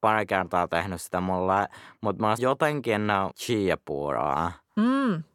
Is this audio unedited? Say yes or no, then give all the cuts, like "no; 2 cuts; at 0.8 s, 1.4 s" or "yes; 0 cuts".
no; 2 cuts; at 2.4 s, 3.3 s